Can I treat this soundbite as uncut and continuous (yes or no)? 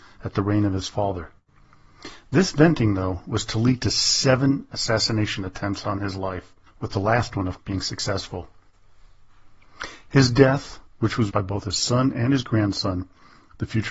no